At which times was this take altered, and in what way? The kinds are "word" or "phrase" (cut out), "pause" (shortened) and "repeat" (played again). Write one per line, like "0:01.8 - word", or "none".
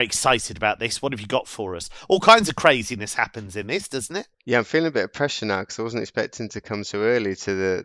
0:04.3 - pause